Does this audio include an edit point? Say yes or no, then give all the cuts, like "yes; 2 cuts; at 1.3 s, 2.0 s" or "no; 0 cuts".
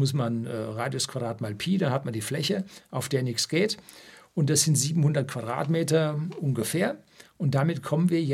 no; 0 cuts